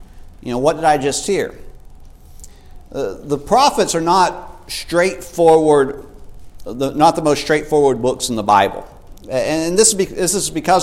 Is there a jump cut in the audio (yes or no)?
no